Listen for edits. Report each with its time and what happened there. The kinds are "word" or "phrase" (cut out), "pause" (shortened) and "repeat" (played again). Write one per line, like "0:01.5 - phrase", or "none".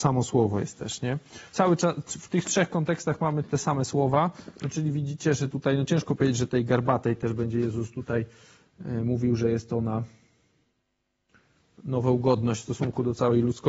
0:01.5 - pause